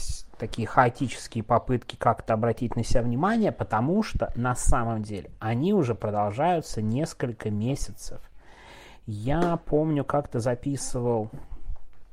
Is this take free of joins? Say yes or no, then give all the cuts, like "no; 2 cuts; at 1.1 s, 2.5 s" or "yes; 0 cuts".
yes; 0 cuts